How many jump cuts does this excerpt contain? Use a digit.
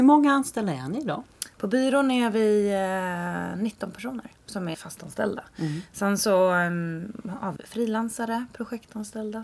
2